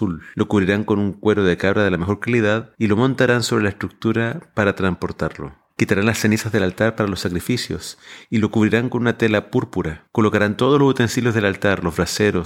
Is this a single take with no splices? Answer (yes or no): no